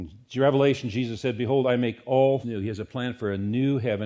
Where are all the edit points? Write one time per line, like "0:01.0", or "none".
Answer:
0:02.4